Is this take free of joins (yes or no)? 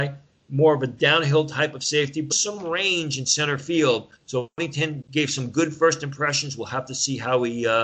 no